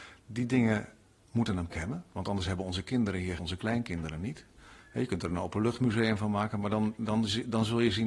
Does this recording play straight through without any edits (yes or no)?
no